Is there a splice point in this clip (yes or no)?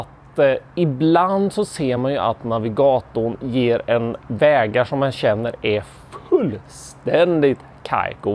no